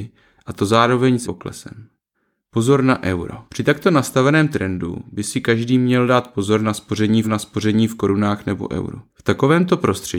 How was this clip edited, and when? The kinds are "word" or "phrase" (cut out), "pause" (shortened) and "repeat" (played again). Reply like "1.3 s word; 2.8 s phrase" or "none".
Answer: 1.2 s word; 2.1 s pause; 3.5 s pause; 7.2 s repeat; 9.1 s pause